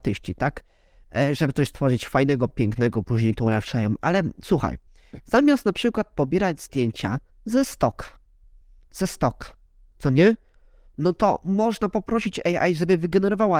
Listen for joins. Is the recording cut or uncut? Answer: uncut